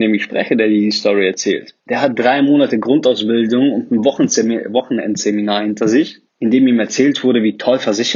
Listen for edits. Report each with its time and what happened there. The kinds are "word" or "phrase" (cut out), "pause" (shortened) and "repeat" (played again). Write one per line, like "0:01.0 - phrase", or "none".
0:01.8 - pause
0:06.3 - pause